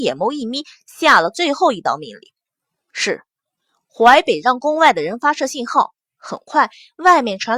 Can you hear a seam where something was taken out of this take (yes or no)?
no